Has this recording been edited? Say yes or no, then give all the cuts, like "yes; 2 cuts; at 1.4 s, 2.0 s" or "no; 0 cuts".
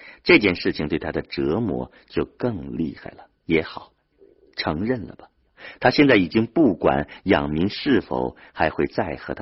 yes; 1 cut; at 3.4 s